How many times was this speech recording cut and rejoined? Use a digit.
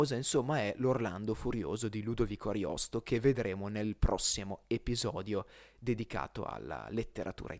0